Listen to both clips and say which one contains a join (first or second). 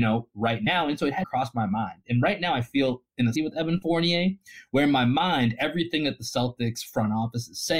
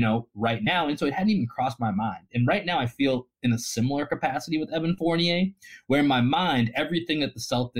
first